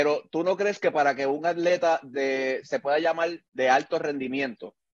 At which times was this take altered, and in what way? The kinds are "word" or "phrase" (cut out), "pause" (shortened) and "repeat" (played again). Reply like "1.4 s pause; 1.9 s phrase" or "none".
3.5 s pause